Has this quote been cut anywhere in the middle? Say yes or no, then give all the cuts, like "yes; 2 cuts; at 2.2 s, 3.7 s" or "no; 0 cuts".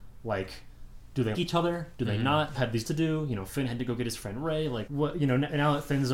yes; 4 cuts; at 1.3 s, 2.5 s, 2.8 s, 4.9 s